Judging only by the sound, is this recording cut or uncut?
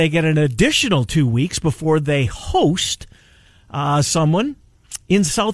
uncut